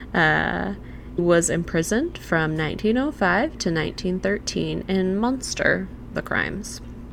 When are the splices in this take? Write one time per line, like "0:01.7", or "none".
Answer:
0:01.2
0:06.1